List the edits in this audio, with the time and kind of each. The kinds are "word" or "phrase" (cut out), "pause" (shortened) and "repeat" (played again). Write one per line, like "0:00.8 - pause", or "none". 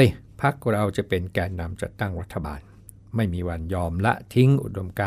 none